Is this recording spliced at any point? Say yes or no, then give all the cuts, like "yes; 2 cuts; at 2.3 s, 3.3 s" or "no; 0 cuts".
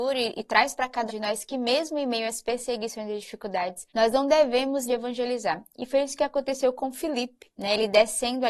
yes; 4 cuts; at 1.1 s, 3.9 s, 4.9 s, 7.5 s